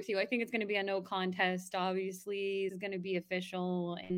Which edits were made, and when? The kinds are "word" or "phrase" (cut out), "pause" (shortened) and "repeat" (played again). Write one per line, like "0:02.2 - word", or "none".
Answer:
0:02.7 - word